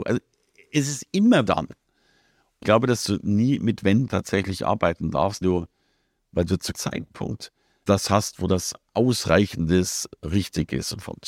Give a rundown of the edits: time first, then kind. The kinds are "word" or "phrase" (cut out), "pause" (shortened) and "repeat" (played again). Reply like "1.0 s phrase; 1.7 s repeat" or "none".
1.5 s word; 2.6 s word; 4.1 s word; 5.4 s word; 6.7 s word; 7.9 s word